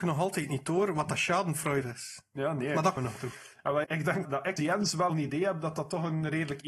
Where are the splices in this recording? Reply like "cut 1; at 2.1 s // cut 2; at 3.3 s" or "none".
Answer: cut 1; at 1.8 s // cut 2; at 3.0 s // cut 3; at 3.8 s // cut 4; at 4.2 s // cut 5; at 4.6 s // cut 6; at 5.1 s